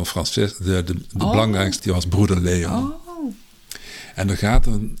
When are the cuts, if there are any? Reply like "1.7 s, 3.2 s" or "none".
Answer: 1.8 s